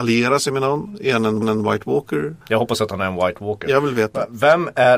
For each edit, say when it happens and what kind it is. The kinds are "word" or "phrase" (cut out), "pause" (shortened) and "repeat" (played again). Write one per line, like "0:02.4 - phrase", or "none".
0:01.4 - repeat
0:02.4 - pause